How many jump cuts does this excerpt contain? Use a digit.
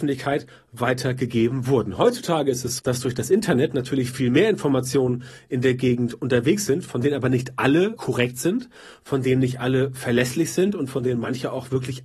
2